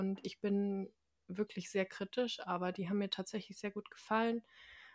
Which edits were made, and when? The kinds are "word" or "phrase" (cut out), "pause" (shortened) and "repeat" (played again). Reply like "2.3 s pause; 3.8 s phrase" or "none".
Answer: none